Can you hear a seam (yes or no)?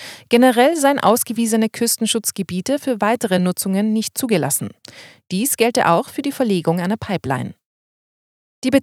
no